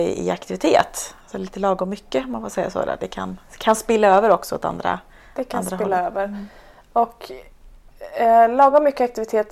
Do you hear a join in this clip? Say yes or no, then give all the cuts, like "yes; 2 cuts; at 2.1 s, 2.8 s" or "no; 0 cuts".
no; 0 cuts